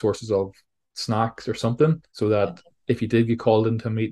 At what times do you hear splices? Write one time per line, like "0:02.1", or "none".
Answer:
0:02.1